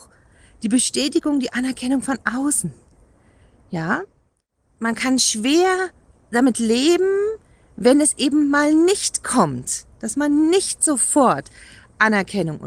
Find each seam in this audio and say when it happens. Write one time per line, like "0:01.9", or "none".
none